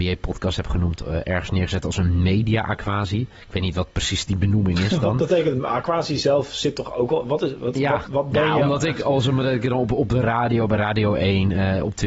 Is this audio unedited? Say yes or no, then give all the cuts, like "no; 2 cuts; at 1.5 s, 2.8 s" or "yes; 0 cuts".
no; 1 cut; at 8.1 s